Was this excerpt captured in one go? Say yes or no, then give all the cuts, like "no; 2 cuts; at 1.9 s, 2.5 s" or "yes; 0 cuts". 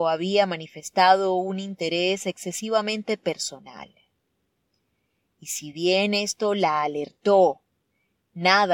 yes; 0 cuts